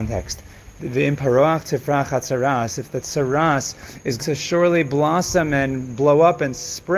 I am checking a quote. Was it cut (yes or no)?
yes